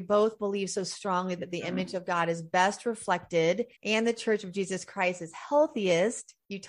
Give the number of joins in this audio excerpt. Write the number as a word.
one